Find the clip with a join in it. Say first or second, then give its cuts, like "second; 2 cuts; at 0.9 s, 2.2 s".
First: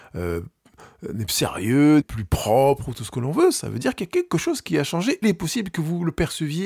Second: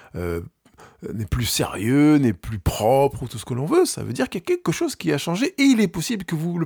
first; 3 cuts; at 1.3 s, 2.0 s, 5.2 s